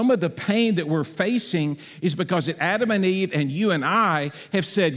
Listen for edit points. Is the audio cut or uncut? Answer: uncut